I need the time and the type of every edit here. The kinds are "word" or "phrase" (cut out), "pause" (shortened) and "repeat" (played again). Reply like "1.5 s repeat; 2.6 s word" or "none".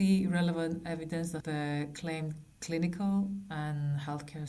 1.4 s word